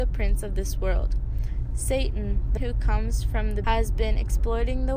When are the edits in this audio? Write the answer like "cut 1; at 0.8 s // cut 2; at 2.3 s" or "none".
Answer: cut 1; at 2.6 s // cut 2; at 3.6 s